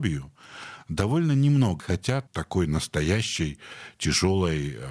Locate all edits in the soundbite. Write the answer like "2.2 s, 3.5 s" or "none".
1.8 s, 2.3 s